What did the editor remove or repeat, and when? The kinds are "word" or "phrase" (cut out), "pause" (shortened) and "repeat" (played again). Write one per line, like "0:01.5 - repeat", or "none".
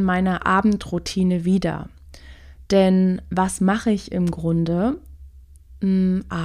none